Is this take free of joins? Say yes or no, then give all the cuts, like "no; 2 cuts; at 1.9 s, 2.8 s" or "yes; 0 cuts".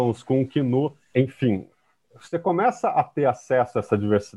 yes; 0 cuts